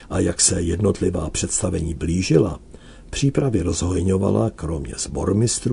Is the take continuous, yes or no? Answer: yes